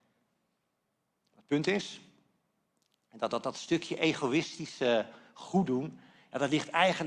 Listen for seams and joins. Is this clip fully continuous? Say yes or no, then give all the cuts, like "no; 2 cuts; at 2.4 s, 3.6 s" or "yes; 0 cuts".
yes; 0 cuts